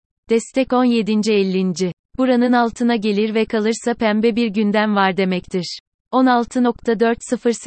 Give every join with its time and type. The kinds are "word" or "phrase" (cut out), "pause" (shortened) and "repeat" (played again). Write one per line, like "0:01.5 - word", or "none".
none

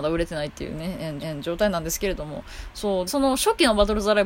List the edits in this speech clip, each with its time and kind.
0:01.2 - repeat
0:03.1 - word

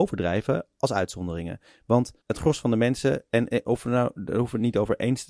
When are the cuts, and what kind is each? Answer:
0:02.2 - pause

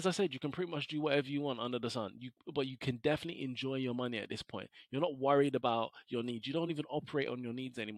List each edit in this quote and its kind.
none

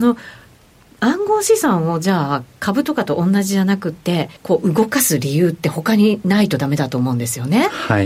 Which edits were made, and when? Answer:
0:04.4 - pause

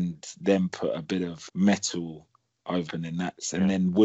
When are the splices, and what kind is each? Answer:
0:01.5 - word
0:02.9 - phrase

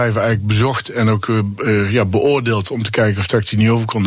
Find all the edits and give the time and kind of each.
none

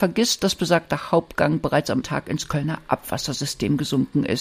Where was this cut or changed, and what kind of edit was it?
0:02.0 - word

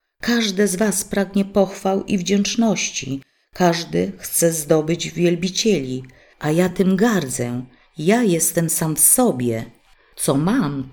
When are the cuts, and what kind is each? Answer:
none

